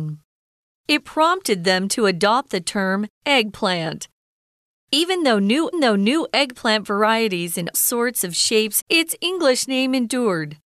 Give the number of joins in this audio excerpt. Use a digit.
4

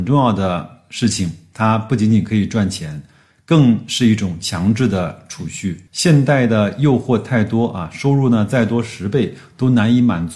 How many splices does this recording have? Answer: 0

